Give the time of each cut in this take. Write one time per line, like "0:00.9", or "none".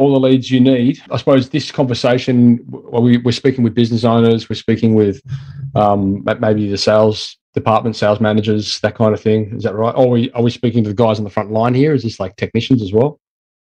0:01.1